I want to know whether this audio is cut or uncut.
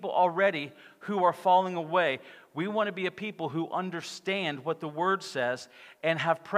uncut